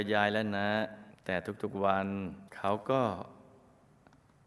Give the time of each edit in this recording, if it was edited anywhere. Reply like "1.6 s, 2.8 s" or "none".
1.1 s, 2.5 s

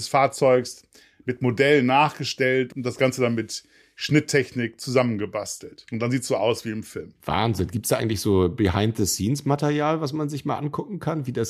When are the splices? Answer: none

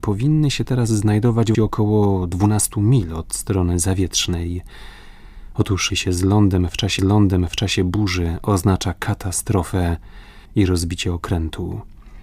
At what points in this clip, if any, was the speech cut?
1.5 s, 5.9 s, 7.0 s, 10.5 s

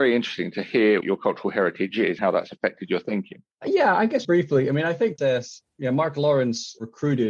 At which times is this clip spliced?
1.0 s, 2.2 s, 3.5 s, 4.2 s, 5.2 s

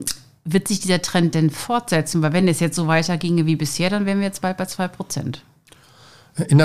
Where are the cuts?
none

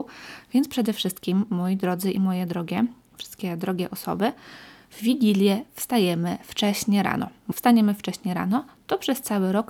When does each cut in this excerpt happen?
7.5 s

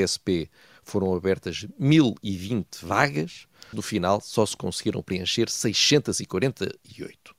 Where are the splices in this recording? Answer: 3.7 s

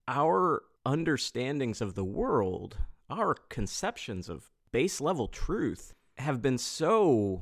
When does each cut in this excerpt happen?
none

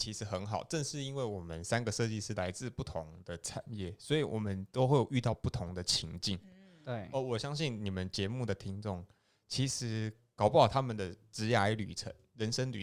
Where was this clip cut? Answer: none

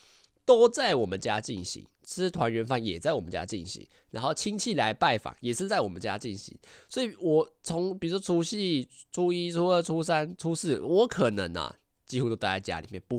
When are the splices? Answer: 1.9 s, 7.6 s

